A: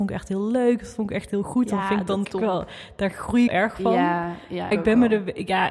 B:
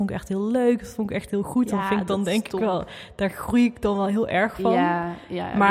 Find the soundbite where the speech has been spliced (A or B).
A